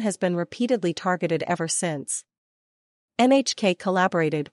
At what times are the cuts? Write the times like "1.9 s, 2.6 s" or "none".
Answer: none